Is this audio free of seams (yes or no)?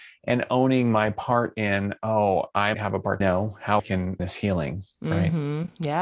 no